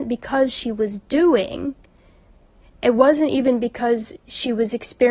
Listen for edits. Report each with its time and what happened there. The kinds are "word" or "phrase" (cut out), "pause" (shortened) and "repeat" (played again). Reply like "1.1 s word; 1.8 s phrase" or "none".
none